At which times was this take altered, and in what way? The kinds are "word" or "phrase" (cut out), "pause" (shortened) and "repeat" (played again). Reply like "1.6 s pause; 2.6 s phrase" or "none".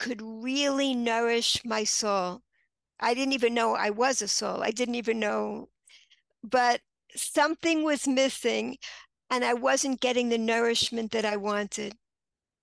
none